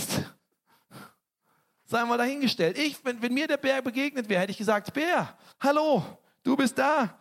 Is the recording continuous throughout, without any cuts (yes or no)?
no